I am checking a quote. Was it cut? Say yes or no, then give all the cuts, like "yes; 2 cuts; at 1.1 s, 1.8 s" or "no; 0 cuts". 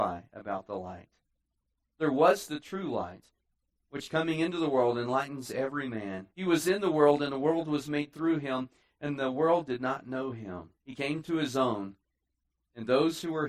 yes; 2 cuts; at 6.3 s, 10.7 s